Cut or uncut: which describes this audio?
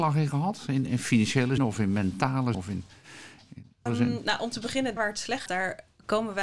cut